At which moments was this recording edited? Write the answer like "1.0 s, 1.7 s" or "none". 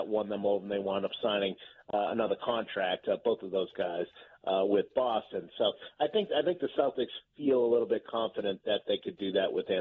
none